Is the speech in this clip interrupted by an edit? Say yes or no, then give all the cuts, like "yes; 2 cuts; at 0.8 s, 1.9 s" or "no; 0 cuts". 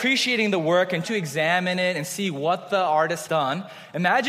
yes; 2 cuts; at 1.0 s, 3.3 s